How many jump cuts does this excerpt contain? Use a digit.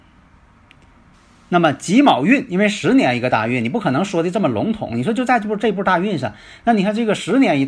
0